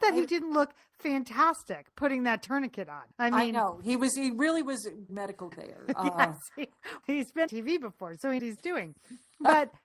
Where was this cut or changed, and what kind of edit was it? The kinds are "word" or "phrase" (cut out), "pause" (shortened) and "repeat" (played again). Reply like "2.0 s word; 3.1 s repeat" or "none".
3.1 s pause; 5.1 s phrase; 5.5 s word; 7.0 s word; 7.5 s phrase; 8.4 s phrase